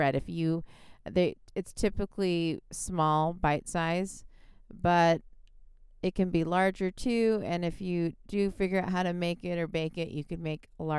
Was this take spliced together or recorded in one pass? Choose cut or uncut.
uncut